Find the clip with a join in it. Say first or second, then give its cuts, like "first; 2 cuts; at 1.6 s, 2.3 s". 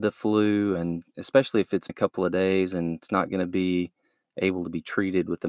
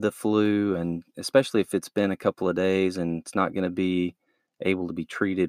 first; 1 cut; at 1.9 s